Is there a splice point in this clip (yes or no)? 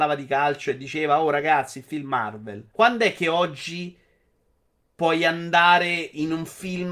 yes